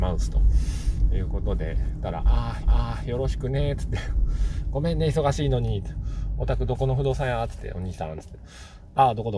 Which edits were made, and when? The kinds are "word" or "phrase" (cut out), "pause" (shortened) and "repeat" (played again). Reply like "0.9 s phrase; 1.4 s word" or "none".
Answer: 2.6 s repeat